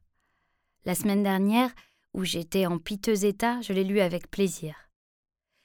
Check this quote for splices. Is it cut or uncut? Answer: uncut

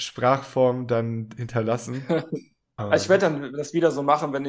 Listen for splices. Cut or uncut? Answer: cut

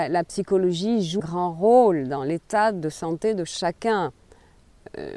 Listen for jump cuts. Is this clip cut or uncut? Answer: cut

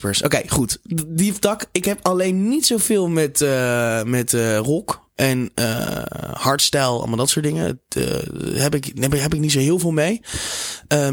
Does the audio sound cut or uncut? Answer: uncut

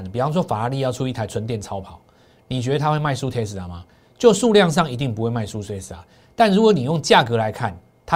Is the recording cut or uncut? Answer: uncut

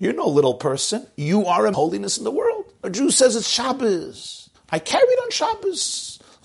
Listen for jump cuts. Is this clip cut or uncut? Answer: cut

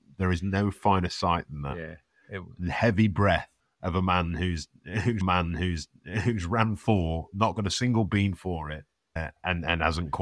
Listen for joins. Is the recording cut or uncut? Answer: cut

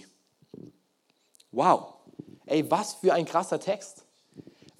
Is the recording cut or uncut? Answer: uncut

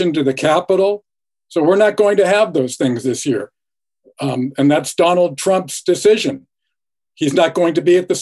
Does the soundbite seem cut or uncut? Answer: uncut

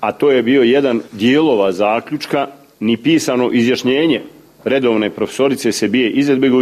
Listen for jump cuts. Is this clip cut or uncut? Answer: cut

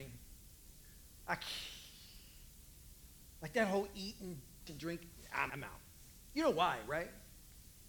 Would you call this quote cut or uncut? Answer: cut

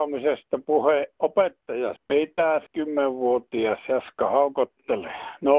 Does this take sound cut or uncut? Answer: cut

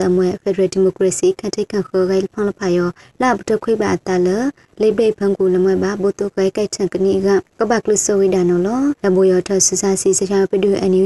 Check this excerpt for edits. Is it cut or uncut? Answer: cut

